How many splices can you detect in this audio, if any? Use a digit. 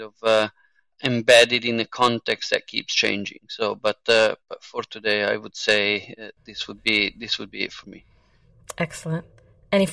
0